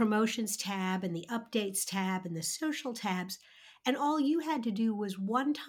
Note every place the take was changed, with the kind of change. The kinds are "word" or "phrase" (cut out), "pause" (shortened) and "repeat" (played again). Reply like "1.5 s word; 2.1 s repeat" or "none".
none